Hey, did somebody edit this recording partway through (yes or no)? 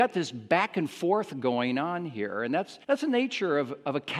yes